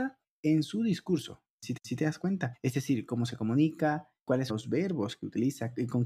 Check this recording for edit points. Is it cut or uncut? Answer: cut